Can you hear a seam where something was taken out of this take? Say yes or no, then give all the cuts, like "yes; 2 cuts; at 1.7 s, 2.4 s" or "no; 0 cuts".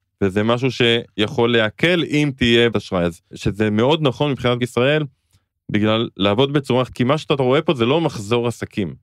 yes; 4 cuts; at 2.7 s, 3.3 s, 4.6 s, 6.9 s